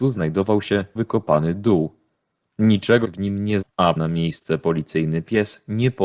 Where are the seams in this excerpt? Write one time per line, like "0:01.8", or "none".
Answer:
0:01.0
0:03.0
0:03.6
0:04.0